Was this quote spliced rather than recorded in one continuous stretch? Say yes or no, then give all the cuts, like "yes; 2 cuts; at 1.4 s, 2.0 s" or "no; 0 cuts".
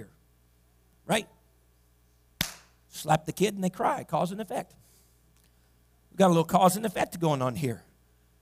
no; 0 cuts